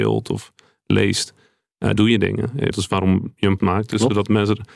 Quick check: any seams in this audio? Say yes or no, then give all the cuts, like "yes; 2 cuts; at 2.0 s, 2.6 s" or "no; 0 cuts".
yes; 3 cuts; at 2.0 s, 2.7 s, 3.6 s